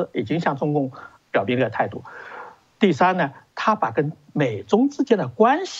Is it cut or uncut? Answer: uncut